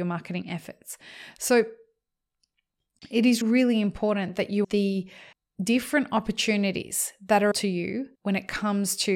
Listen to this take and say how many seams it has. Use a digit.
5